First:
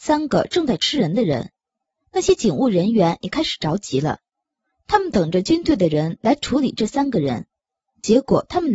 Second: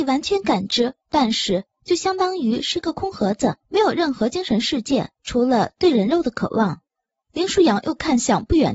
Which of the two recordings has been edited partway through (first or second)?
second